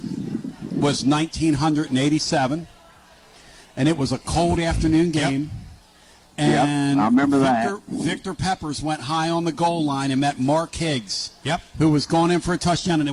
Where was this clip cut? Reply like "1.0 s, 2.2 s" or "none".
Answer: none